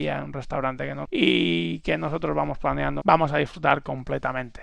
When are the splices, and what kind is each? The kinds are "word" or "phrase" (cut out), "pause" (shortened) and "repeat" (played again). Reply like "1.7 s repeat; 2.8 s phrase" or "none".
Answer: 1.1 s word; 3.0 s phrase